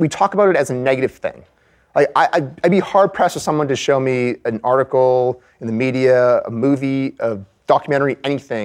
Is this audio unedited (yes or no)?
yes